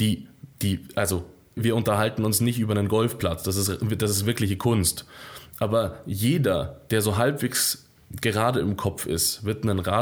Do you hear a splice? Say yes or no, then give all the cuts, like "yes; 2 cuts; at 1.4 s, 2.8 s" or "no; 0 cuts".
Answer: yes; 1 cut; at 1.6 s